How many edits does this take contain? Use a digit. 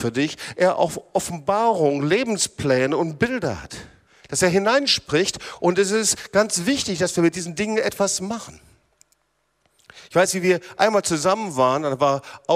1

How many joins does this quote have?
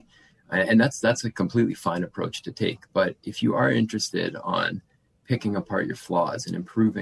0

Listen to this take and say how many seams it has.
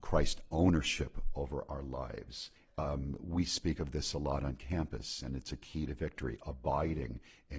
1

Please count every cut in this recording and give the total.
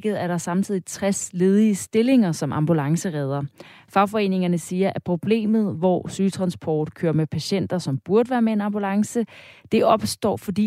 0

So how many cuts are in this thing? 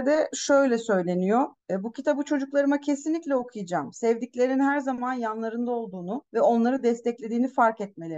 2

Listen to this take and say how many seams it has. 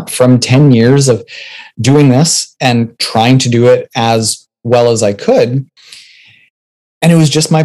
0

